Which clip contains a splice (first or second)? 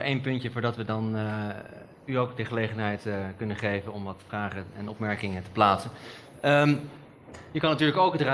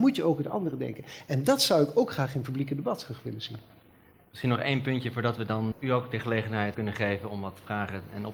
second